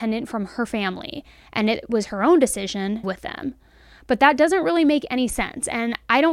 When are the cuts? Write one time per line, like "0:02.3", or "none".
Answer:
0:03.0